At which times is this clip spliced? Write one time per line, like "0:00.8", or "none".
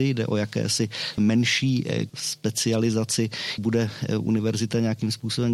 0:01.2
0:02.1
0:03.6